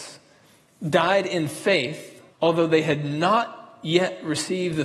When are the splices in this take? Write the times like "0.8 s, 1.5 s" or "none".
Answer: 2.3 s

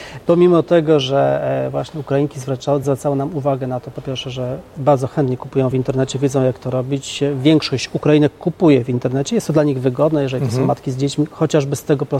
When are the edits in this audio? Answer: none

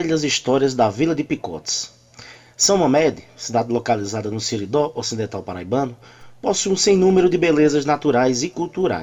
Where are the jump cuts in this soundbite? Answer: none

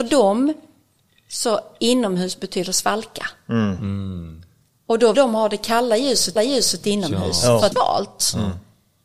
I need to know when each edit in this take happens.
4.6 s, 5.1 s, 6.4 s, 7.7 s

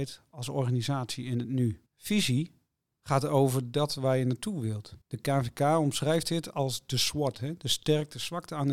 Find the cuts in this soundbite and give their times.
1.9 s, 5.0 s

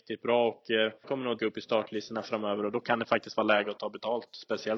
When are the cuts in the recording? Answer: 1.0 s, 1.4 s

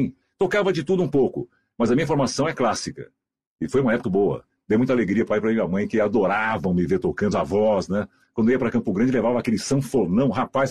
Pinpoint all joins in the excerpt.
4.0 s, 5.3 s, 7.3 s

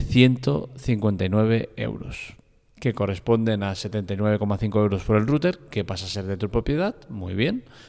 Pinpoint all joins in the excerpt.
none

